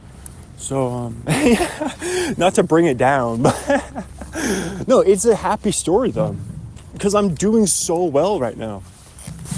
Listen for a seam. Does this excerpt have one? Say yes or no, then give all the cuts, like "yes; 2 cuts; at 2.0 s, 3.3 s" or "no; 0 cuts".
no; 0 cuts